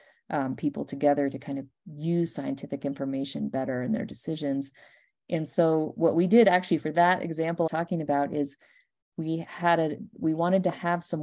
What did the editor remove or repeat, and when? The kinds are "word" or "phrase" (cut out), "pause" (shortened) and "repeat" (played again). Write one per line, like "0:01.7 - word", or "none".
0:07.7 - phrase